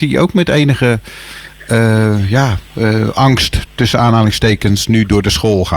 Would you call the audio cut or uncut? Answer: uncut